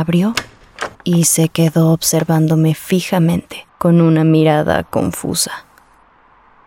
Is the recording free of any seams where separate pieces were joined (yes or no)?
no